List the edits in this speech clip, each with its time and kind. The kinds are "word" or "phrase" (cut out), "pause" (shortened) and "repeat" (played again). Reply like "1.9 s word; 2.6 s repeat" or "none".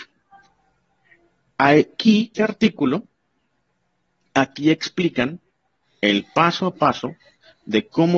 2.3 s phrase